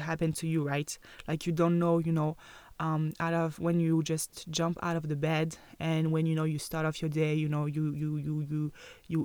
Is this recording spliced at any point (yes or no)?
no